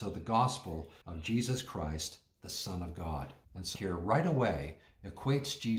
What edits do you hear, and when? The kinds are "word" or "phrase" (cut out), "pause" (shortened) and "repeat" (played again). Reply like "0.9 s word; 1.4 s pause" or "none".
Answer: 1.0 s pause; 3.4 s pause; 3.8 s word